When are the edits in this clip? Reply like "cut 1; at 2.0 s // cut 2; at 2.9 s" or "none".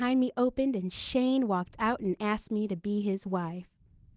none